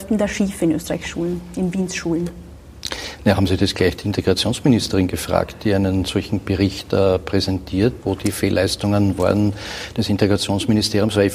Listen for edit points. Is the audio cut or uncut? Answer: cut